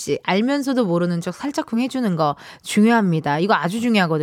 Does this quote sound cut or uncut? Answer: uncut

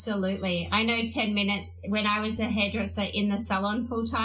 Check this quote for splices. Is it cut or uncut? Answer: uncut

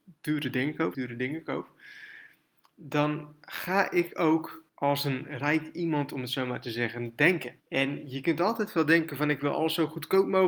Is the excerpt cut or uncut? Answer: cut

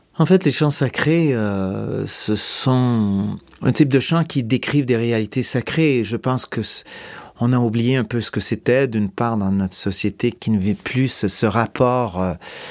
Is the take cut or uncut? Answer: uncut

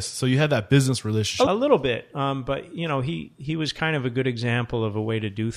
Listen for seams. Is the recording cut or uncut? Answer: cut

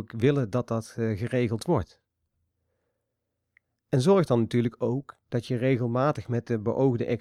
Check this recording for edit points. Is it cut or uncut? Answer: uncut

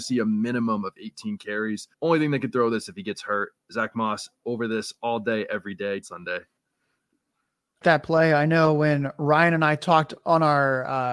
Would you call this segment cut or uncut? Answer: cut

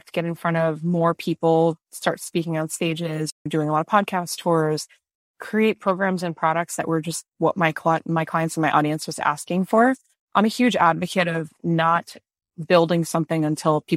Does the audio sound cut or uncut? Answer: uncut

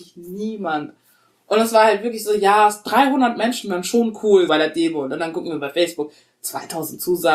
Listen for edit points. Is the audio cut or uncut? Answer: cut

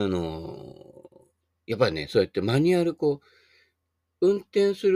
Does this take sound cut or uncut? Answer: uncut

